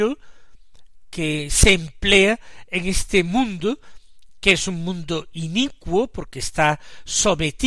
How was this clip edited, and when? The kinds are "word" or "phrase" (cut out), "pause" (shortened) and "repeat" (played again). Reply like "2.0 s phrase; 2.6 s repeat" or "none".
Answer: none